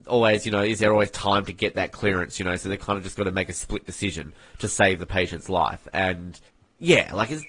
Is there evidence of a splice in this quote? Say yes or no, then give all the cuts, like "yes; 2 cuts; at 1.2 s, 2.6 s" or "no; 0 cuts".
yes; 1 cut; at 6.5 s